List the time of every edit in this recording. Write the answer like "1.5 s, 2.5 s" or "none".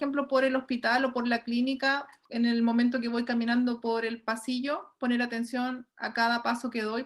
none